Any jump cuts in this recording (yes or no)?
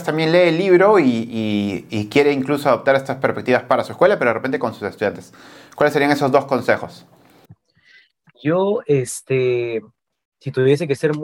no